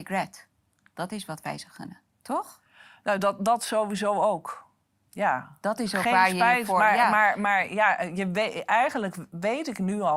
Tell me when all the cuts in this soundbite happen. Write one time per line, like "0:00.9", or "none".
none